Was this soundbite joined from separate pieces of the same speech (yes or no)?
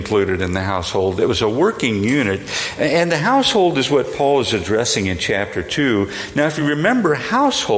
no